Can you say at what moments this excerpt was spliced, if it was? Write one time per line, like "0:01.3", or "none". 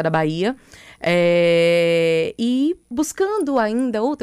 0:02.9

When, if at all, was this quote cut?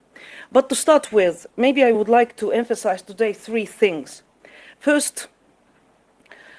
none

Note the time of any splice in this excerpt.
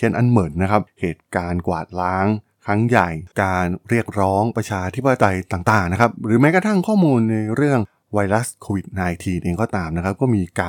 0:03.3

